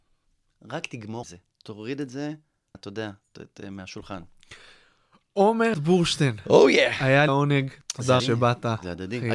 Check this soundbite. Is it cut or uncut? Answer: cut